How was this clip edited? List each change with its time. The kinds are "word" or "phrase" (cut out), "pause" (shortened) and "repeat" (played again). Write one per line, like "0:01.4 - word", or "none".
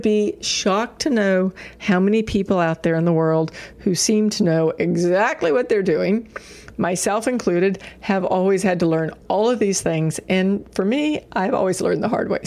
none